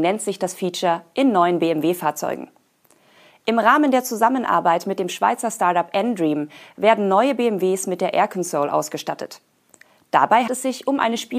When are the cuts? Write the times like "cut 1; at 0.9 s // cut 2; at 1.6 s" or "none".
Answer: cut 1; at 10.5 s